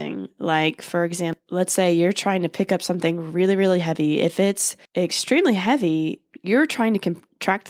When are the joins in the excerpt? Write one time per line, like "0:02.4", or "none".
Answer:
0:04.8